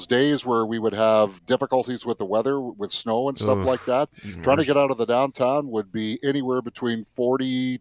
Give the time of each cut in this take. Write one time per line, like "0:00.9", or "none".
0:01.4